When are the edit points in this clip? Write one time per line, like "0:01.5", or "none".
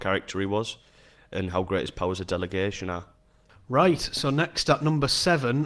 none